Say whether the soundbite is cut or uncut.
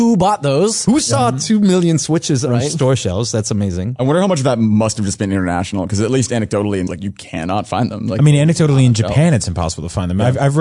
cut